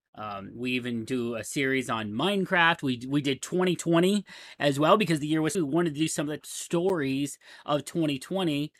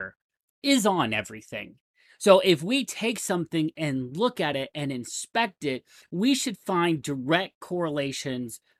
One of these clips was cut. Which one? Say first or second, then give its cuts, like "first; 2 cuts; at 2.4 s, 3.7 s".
first; 2 cuts; at 5.5 s, 6.4 s